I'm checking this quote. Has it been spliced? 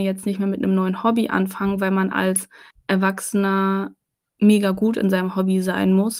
yes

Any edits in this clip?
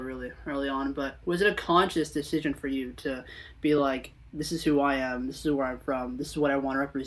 no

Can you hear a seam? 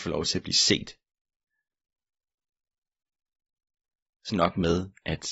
yes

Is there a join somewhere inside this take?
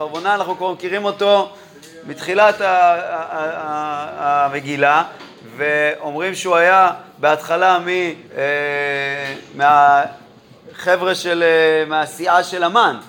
yes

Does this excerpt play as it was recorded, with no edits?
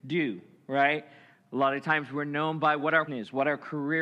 no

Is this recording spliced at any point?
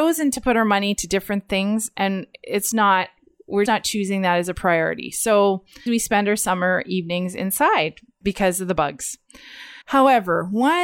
yes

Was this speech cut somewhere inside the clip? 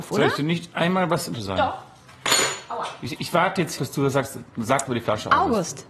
yes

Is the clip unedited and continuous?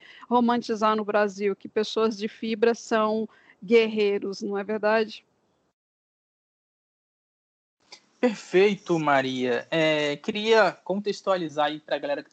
yes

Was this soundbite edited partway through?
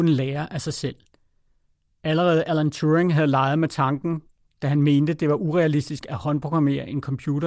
no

